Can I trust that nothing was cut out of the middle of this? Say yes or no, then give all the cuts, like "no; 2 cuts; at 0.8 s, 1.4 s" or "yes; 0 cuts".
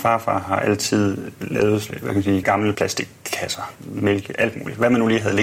no; 5 cuts; at 1.3 s, 1.9 s, 2.4 s, 2.7 s, 3.7 s